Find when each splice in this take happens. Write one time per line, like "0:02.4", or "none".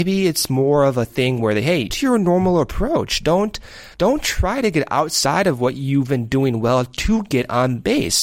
0:01.9
0:03.9